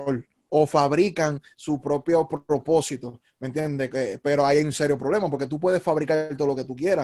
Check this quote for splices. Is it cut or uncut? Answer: uncut